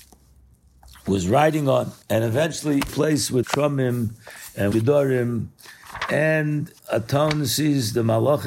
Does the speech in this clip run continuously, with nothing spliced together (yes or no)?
no